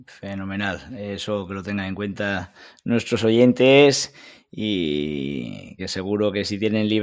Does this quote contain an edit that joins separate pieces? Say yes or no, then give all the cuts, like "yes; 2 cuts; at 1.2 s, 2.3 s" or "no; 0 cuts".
yes; 1 cut; at 5.8 s